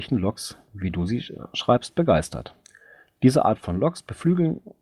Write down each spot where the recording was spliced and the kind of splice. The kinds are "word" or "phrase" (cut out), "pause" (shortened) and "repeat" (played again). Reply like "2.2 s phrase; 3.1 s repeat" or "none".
none